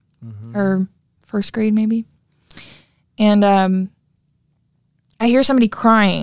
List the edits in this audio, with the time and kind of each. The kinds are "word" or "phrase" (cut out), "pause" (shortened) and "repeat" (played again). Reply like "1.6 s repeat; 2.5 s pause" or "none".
none